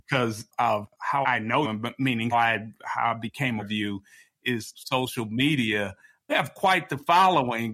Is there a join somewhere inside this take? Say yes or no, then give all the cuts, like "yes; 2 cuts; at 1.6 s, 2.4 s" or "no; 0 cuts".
yes; 6 cuts; at 1.2 s, 1.6 s, 2.3 s, 3.6 s, 4.7 s, 6.3 s